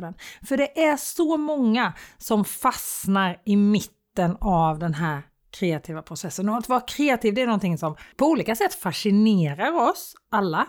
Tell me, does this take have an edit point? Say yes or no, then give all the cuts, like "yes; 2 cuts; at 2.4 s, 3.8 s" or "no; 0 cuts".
yes; 1 cut; at 8.1 s